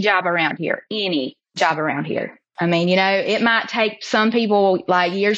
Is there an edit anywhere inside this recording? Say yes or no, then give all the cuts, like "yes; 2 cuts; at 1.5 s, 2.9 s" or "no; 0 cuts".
yes; 1 cut; at 1.4 s